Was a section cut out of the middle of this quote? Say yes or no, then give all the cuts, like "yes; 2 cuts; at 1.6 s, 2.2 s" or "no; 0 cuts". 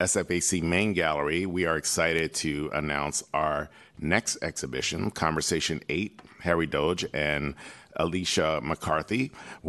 no; 0 cuts